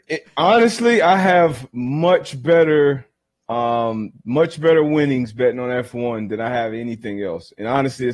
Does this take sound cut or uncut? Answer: uncut